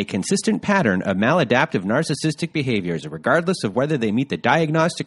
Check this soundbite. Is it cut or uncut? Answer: uncut